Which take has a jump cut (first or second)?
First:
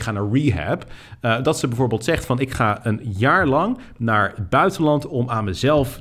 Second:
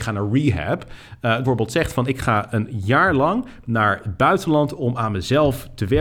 second